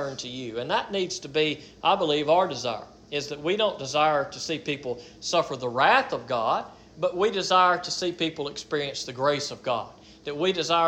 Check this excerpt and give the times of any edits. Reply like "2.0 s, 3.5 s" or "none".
none